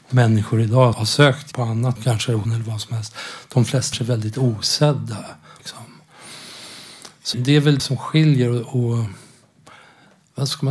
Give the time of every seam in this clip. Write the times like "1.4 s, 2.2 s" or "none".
0.9 s, 1.5 s, 2.0 s, 2.5 s, 3.9 s, 5.6 s, 7.3 s, 7.8 s

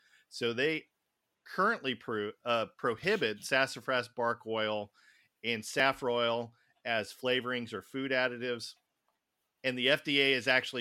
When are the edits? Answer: none

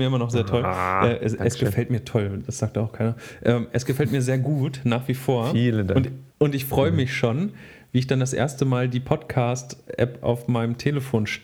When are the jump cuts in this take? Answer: 6.3 s

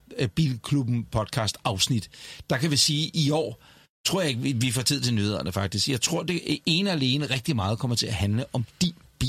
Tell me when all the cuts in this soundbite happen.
none

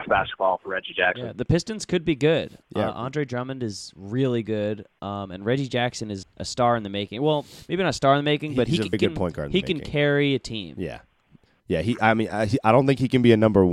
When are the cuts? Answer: 1.3 s, 6.2 s, 8.9 s

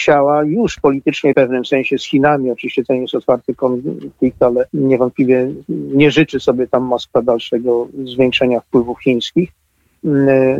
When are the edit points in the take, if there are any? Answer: 1.3 s, 4.7 s

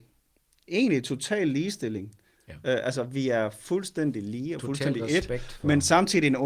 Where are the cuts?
none

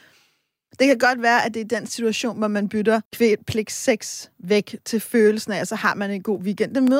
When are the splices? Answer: 3.1 s

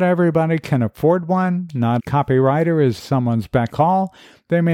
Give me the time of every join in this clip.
2.0 s, 3.0 s, 3.7 s

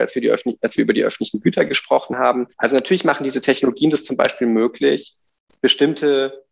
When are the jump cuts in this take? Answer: 2.5 s

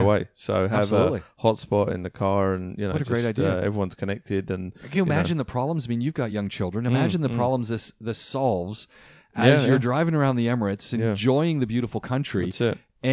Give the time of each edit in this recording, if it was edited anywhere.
none

